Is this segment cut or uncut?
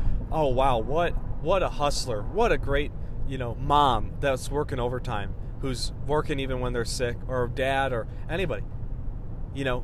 cut